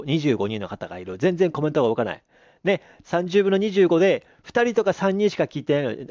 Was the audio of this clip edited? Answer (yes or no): no